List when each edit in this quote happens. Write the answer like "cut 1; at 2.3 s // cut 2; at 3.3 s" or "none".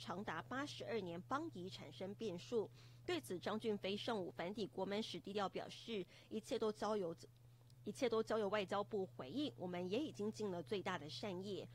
none

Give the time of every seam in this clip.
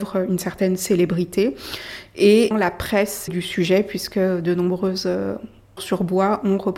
cut 1; at 2.5 s // cut 2; at 3.3 s // cut 3; at 5.8 s

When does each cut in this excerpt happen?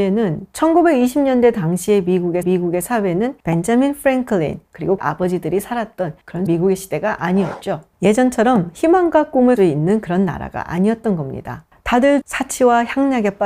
cut 1; at 2.4 s // cut 2; at 5.0 s // cut 3; at 6.5 s // cut 4; at 9.6 s // cut 5; at 12.2 s

